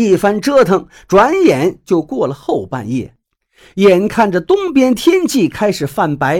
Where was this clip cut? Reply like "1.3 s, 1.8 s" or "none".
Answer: none

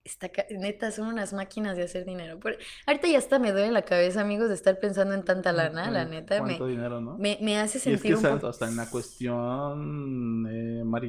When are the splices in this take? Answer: 8.4 s

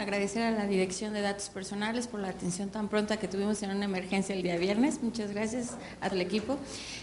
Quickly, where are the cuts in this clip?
6.1 s

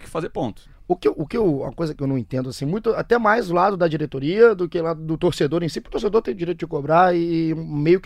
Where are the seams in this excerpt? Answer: none

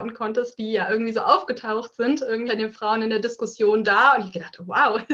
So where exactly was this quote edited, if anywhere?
2.5 s

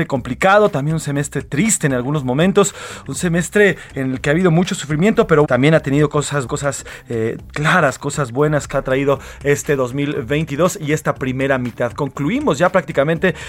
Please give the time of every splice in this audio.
5.4 s, 6.5 s, 8.7 s

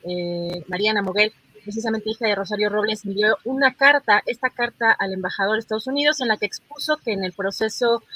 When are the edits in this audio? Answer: none

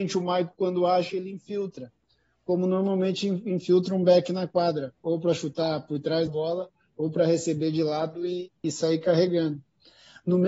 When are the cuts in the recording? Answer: 6.3 s

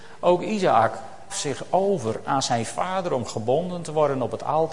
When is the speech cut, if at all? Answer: 1.3 s

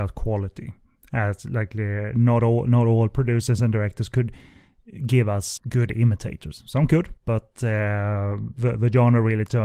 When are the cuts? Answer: 5.6 s, 7.2 s

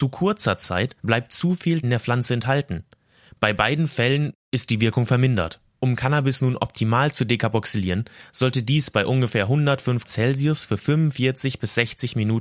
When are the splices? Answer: 1.0 s, 1.8 s, 5.7 s, 10.0 s

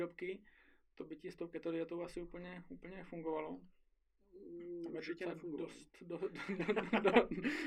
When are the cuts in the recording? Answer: none

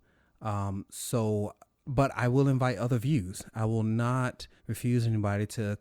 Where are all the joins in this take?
1.7 s, 4.6 s

